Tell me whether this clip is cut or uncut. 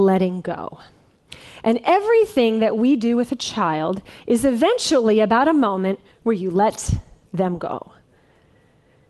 uncut